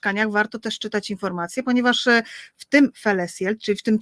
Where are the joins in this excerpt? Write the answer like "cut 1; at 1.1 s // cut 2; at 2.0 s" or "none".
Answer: none